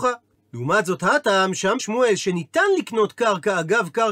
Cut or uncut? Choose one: cut